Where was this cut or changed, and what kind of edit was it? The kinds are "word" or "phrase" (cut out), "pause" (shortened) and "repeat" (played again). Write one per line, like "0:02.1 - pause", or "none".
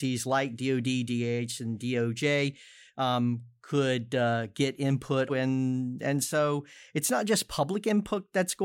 0:05.3 - word